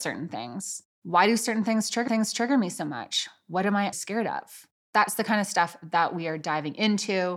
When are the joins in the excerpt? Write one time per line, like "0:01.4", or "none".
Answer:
0:00.9
0:02.1
0:03.9